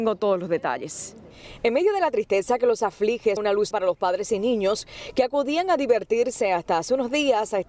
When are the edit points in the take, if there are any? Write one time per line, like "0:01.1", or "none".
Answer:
0:03.4
0:03.7